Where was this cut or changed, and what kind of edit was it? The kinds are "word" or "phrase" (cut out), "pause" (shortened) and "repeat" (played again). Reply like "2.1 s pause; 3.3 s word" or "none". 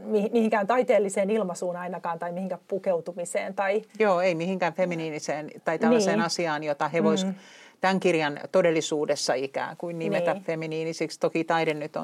3.9 s pause

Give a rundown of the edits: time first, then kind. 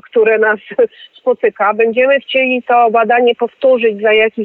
none

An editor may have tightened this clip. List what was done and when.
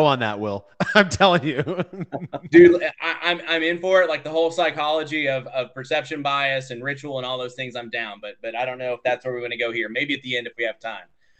none

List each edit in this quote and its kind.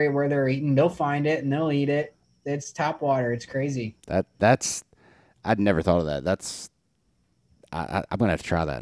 4.0 s pause

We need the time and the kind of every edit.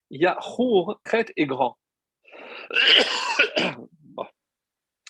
1.1 s word

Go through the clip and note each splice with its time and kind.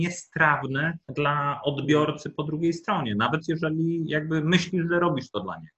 1.0 s pause

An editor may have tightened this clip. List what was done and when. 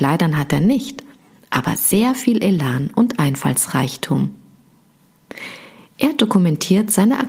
none

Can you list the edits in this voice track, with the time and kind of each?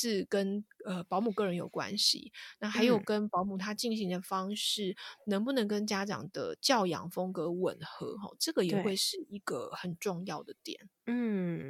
none

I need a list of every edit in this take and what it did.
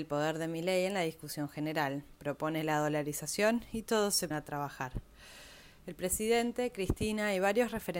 4.3 s word

